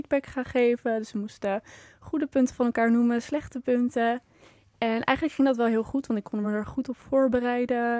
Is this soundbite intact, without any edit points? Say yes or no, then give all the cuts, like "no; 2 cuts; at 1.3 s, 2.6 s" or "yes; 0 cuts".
yes; 0 cuts